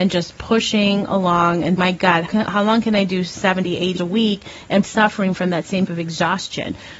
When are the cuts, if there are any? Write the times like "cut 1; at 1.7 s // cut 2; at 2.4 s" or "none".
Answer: cut 1; at 1.8 s // cut 2; at 2.3 s // cut 3; at 4.0 s // cut 4; at 4.8 s // cut 5; at 5.9 s